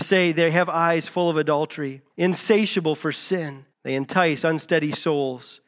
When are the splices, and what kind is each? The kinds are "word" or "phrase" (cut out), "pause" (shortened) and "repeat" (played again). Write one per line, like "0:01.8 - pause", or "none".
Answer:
0:02.1 - pause
0:03.7 - pause